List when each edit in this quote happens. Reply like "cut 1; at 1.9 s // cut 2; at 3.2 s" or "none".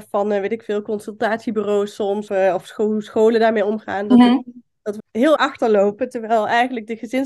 cut 1; at 2.3 s // cut 2; at 5.0 s // cut 3; at 5.4 s